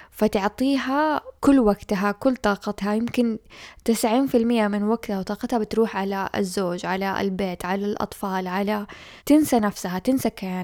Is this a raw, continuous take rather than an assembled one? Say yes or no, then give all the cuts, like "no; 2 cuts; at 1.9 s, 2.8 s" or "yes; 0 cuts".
no; 2 cuts; at 1.4 s, 9.2 s